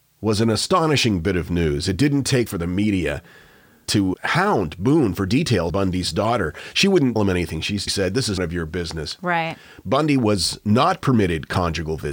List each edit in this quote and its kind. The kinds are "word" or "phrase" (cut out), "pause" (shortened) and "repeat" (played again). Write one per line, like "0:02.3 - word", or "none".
0:02.5 - word
0:04.1 - word
0:05.7 - word
0:07.2 - word
0:07.9 - word
0:08.4 - word